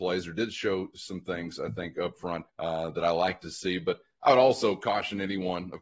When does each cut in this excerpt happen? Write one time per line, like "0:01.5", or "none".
0:02.5